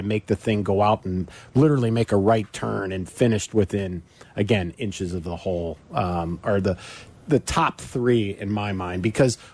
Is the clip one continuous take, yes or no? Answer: yes